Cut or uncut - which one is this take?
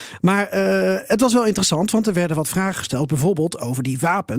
uncut